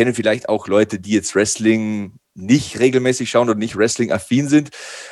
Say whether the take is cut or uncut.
uncut